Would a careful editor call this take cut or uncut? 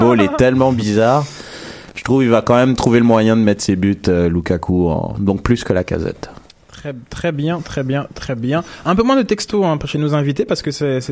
uncut